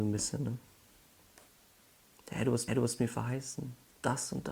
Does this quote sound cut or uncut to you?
cut